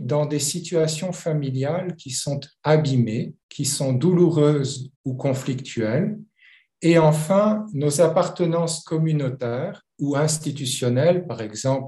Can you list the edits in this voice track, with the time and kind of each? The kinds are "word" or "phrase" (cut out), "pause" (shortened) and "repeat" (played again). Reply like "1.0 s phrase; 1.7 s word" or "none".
3.4 s pause; 5.0 s pause; 9.9 s pause